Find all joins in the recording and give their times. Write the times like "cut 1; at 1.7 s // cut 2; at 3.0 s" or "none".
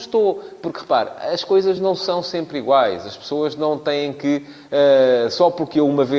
none